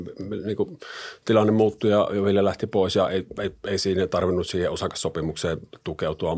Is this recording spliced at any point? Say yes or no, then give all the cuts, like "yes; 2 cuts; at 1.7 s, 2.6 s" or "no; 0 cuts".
no; 0 cuts